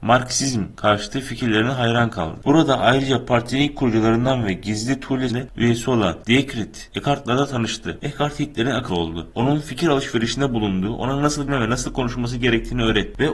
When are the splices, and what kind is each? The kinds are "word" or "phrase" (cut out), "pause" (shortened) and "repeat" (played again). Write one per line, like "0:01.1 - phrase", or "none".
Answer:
0:05.3 - word
0:08.9 - word
0:11.5 - word